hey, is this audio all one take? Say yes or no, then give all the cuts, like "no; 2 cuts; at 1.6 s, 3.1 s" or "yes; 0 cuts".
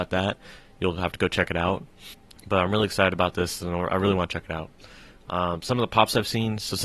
yes; 0 cuts